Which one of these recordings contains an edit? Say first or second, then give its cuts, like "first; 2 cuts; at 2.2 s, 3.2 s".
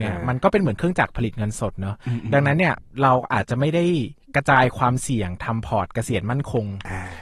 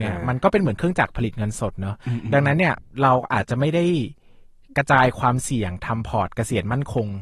first; 1 cut; at 4.2 s